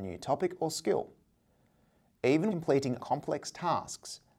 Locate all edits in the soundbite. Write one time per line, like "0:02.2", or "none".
0:02.5
0:03.0